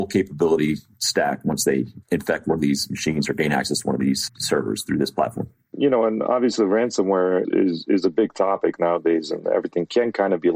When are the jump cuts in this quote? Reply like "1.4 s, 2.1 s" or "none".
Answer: 4.3 s, 7.4 s